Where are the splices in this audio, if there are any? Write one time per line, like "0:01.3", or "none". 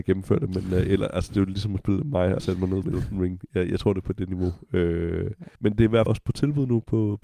0:02.4
0:02.8
0:05.5
0:06.1